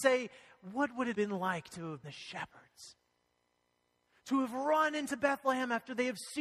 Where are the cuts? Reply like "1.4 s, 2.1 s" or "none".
1.1 s, 2.0 s